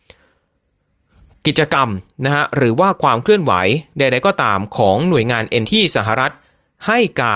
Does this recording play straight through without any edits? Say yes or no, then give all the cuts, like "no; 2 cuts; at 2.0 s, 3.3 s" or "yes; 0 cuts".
no; 1 cut; at 5.6 s